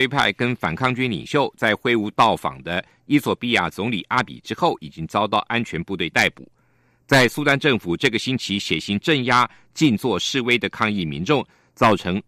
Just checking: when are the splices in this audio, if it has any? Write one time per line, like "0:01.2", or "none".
none